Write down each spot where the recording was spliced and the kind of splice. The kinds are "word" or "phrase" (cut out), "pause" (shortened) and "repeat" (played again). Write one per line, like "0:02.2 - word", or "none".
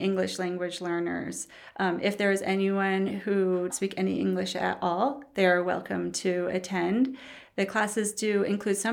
0:03.7 - phrase